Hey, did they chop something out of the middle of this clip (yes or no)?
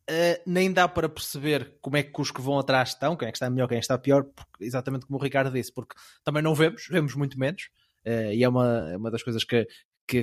no